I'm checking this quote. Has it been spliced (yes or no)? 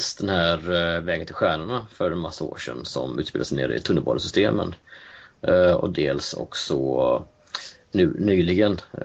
no